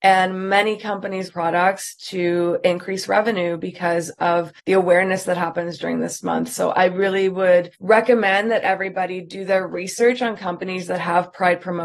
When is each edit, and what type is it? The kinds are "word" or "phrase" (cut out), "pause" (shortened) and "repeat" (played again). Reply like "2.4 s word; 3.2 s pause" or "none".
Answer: 1.3 s phrase; 4.6 s pause; 7.7 s pause